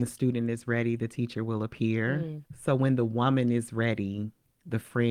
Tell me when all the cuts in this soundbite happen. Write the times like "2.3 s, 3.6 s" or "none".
2.5 s